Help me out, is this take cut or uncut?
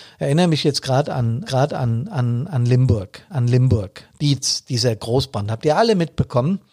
cut